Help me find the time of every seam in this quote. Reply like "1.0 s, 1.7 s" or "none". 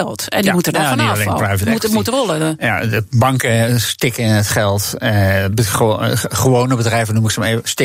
none